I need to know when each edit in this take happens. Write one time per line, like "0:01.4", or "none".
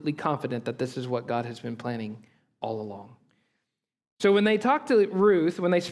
none